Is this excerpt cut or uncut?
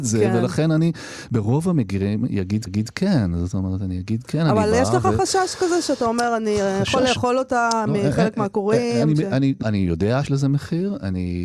cut